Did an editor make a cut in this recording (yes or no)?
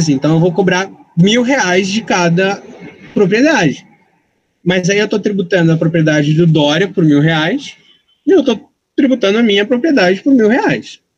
no